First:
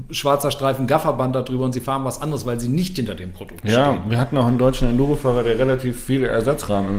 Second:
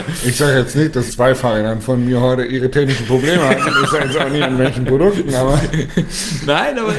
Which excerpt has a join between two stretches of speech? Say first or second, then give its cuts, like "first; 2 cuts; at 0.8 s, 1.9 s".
second; 1 cut; at 1.1 s